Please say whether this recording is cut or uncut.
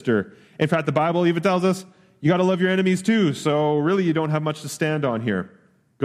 uncut